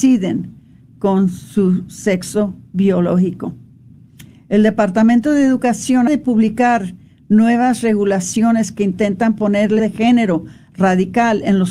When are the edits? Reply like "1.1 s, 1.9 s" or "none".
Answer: 6.1 s, 9.8 s

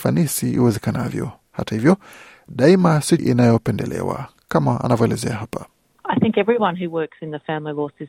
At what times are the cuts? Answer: 3.2 s

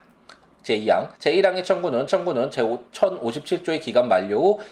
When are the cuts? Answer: 1.2 s, 2.1 s, 2.9 s

